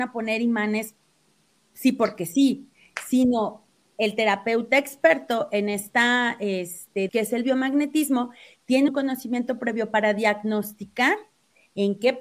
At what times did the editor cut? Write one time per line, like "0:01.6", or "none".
0:07.1
0:08.9